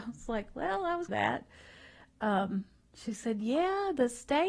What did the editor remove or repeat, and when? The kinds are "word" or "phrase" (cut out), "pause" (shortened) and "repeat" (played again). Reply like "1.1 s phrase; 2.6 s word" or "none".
1.1 s phrase